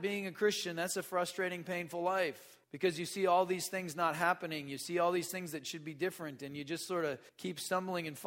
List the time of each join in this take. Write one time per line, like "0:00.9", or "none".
0:02.6
0:07.3